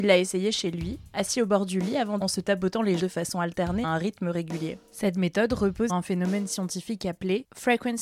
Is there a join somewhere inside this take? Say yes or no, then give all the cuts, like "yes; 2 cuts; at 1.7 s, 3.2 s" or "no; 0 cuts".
yes; 4 cuts; at 2.2 s, 3.0 s, 3.8 s, 5.9 s